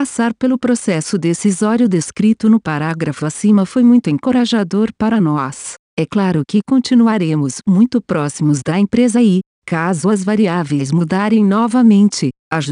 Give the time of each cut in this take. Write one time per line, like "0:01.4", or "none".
none